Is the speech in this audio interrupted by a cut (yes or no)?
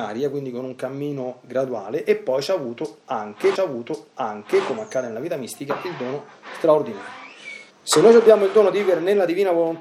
yes